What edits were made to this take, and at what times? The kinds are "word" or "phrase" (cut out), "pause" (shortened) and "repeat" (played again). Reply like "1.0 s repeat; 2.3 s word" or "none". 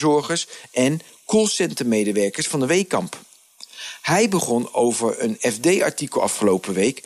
none